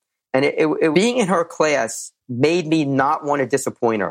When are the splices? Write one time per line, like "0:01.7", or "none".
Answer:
0:00.9
0:02.2